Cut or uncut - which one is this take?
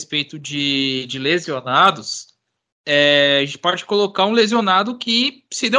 uncut